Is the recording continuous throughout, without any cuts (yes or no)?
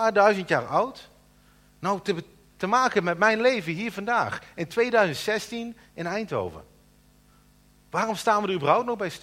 yes